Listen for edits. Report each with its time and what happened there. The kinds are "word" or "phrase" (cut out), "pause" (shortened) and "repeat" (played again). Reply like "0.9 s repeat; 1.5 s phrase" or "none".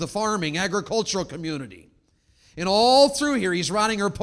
none